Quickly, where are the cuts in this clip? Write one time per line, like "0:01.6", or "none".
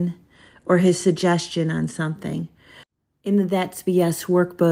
none